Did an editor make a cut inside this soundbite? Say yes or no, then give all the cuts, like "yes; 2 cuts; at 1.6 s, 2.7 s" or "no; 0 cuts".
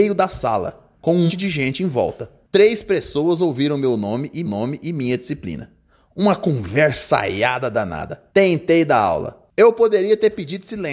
yes; 4 cuts; at 0.9 s, 1.3 s, 4.5 s, 8.3 s